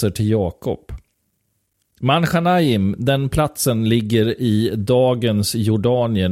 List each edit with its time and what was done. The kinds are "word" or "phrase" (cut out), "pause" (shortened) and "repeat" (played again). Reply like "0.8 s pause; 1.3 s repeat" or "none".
none